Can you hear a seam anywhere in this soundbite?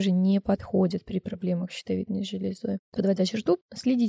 yes; 1 cut; at 2.9 s

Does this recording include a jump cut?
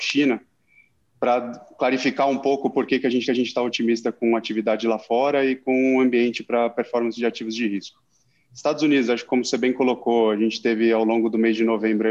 yes; 1 cut; at 3.3 s

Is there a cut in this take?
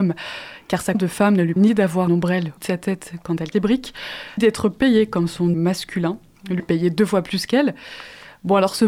yes; 8 cuts; at 0.9 s, 1.6 s, 2.1 s, 2.6 s, 3.5 s, 4.4 s, 5.5 s, 6.6 s

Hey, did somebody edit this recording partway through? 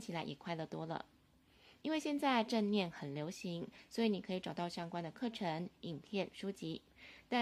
no; 0 cuts

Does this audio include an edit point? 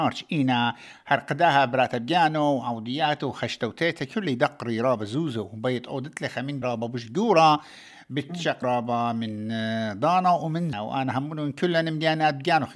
yes; 3 cuts; at 6.6 s, 8.6 s, 10.7 s

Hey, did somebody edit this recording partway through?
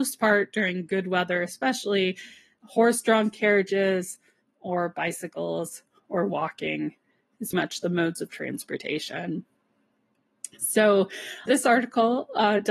yes; 2 cuts; at 7.5 s, 11.5 s

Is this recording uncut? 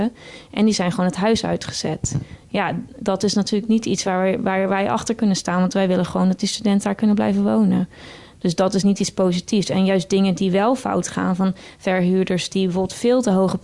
yes; 0 cuts

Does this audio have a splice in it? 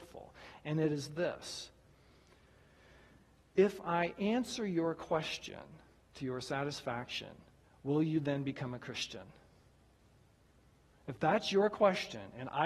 no; 0 cuts

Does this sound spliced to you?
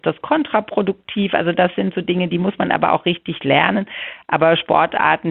no; 0 cuts

